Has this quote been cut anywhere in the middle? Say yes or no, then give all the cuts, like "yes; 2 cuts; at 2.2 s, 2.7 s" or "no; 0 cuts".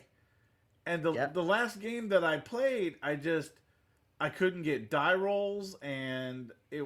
no; 0 cuts